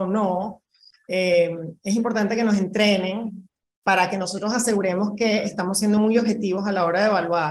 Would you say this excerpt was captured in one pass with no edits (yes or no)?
yes